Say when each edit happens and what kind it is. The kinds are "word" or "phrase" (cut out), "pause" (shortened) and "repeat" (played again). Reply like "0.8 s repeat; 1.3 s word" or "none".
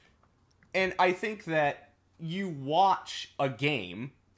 none